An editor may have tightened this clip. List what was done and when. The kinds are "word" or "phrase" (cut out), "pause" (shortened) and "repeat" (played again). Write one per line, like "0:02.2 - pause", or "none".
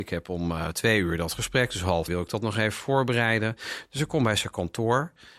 0:02.1 - word